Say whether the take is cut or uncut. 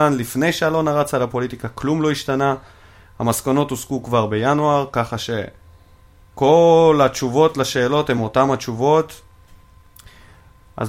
uncut